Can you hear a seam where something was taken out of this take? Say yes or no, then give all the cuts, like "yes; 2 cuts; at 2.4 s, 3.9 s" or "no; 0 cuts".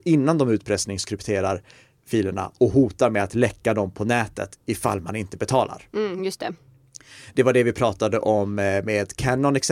no; 0 cuts